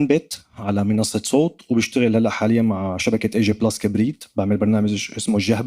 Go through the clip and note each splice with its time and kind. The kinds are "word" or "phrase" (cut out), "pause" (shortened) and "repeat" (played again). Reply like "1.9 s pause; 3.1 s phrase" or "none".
none

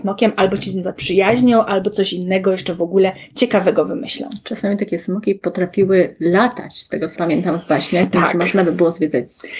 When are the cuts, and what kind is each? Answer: 7.2 s word

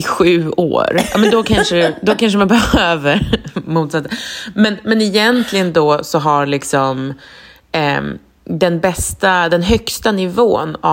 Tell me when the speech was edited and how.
none

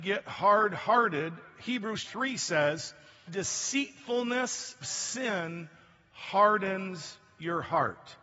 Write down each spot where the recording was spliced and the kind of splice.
2.0 s word; 3.3 s word; 4.8 s word

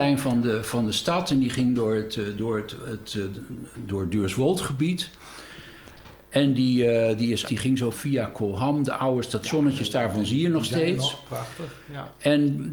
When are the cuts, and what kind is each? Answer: 7.4 s word; 7.9 s phrase

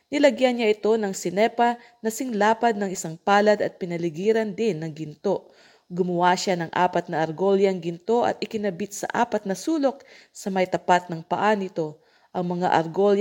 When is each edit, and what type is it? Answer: none

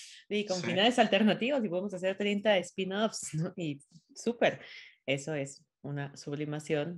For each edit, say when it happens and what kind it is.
none

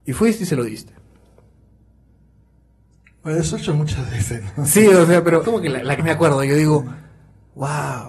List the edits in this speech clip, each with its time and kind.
5.4 s word; 6.0 s word

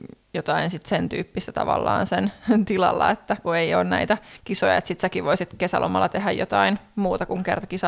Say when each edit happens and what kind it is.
none

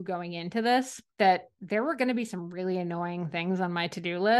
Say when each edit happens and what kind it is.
1.1 s pause

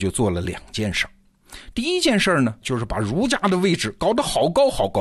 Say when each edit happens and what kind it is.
2.6 s phrase

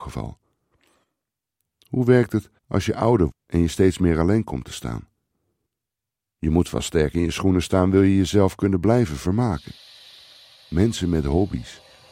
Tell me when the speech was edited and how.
2.6 s pause; 3.3 s word

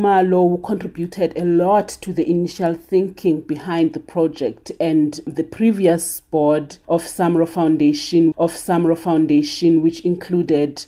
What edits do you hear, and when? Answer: 8.3 s repeat

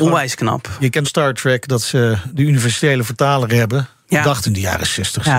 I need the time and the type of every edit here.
1.0 s phrase; 4.5 s phrase

